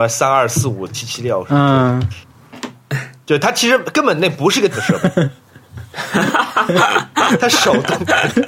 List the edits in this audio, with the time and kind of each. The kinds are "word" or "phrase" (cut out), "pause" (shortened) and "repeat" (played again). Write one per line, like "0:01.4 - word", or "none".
0:04.7 - word